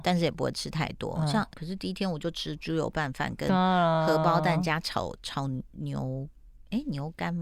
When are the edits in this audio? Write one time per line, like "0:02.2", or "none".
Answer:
0:01.5